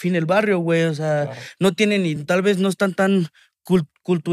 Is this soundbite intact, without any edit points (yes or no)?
yes